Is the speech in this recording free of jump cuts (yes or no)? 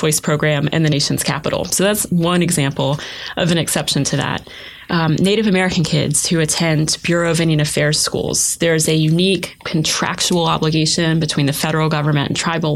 yes